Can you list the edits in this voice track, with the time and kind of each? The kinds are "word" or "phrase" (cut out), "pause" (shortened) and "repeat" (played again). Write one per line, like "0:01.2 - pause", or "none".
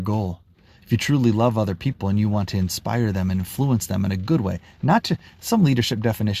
none